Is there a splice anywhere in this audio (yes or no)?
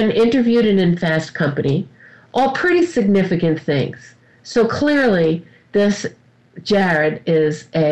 no